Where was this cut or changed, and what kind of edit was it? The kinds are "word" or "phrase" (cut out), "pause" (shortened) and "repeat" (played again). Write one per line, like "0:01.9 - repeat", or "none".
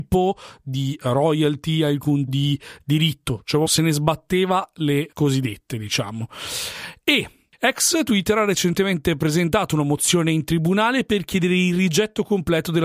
0:02.3 - word
0:03.7 - word
0:05.1 - word